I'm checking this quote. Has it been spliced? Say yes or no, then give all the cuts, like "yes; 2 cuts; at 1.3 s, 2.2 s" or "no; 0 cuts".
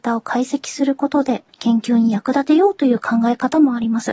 yes; 1 cut; at 1.5 s